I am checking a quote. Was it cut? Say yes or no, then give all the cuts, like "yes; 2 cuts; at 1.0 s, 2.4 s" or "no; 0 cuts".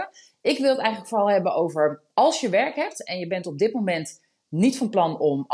no; 0 cuts